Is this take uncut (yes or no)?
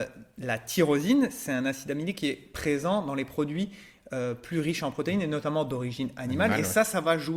yes